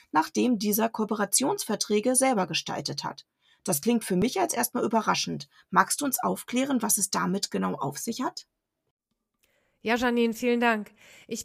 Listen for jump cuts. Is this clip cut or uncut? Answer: uncut